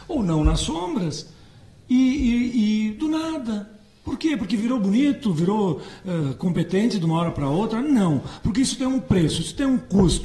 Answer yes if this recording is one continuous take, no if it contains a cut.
yes